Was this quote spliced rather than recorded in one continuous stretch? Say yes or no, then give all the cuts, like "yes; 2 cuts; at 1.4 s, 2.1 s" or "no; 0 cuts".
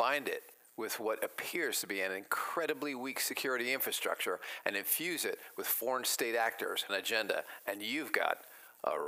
yes; 1 cut; at 6.9 s